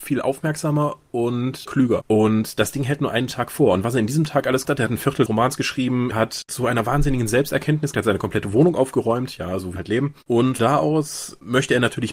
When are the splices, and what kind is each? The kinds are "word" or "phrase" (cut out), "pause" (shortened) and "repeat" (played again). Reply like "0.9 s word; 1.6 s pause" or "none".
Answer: 4.6 s word; 5.3 s word; 6.1 s word; 6.5 s word; 7.9 s word; 9.8 s word; 10.6 s word